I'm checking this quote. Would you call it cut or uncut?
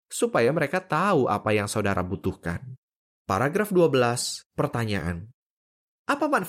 cut